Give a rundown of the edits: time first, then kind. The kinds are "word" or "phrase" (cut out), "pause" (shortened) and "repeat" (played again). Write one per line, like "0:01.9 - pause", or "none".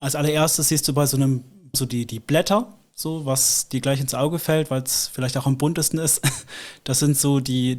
0:01.7 - word